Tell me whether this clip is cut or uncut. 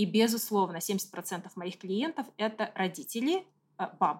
uncut